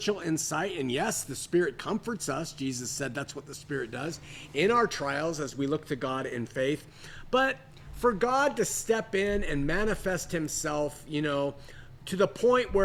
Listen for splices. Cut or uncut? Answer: uncut